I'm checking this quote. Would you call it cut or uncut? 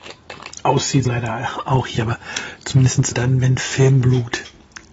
cut